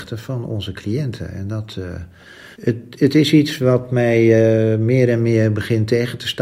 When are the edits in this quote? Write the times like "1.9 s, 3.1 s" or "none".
2.5 s